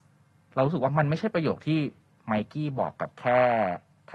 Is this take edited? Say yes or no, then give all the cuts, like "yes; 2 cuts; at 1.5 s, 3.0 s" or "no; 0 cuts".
no; 0 cuts